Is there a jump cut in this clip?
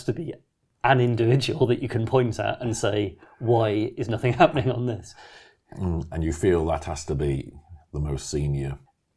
no; 0 cuts

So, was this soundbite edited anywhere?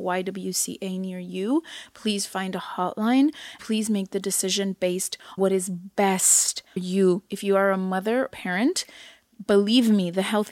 yes; 4 cuts; at 3.6 s, 5.4 s, 6.8 s, 8.3 s

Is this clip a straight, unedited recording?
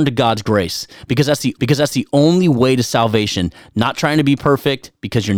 no; 1 cut; at 1.6 s

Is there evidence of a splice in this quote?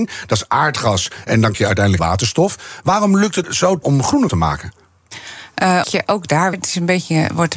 yes; 7 cuts; at 1.5 s, 2.0 s, 3.4 s, 3.8 s, 4.3 s, 5.8 s, 6.5 s

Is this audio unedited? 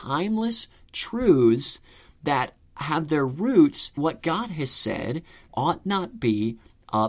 no; 2 cuts; at 4.0 s, 5.5 s

